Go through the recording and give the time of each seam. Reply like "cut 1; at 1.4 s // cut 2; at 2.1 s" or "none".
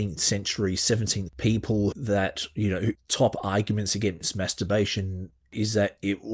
cut 1; at 1.3 s // cut 2; at 1.9 s // cut 3; at 2.9 s

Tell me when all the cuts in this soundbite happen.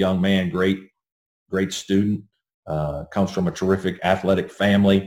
none

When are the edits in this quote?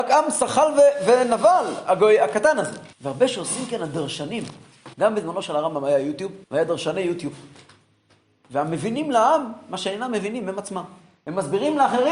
cut 1; at 2.9 s // cut 2; at 4.9 s // cut 3; at 6.4 s

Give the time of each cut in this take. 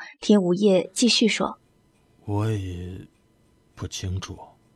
cut 1; at 1.6 s

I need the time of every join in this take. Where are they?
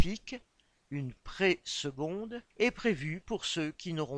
cut 1; at 2.5 s

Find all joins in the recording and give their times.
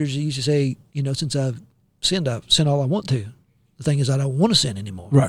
none

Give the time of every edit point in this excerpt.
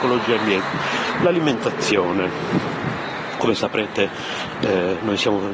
none

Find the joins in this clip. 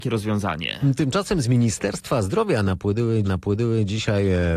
cut 1; at 3.2 s

